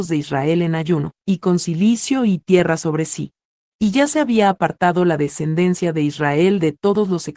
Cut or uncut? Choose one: cut